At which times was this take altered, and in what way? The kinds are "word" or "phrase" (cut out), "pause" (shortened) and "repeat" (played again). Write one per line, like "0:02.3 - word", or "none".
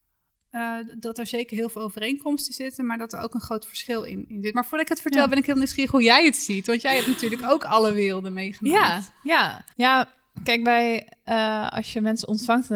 0:09.7 - pause